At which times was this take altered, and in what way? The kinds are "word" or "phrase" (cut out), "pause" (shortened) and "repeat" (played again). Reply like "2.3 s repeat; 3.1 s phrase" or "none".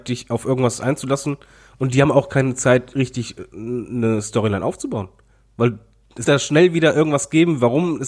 6.3 s word